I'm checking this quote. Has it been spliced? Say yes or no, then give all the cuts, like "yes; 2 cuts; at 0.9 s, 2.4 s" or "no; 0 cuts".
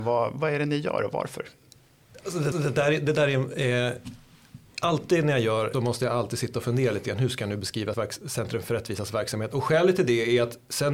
yes; 3 cuts; at 2.5 s, 5.7 s, 7.9 s